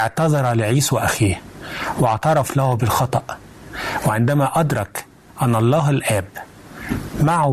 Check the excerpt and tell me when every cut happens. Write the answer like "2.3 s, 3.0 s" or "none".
none